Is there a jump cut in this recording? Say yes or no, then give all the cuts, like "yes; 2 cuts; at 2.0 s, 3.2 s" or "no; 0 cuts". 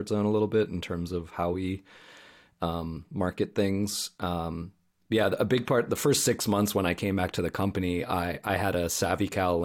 no; 0 cuts